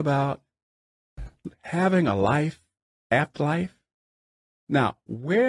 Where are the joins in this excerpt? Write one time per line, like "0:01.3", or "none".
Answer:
0:03.4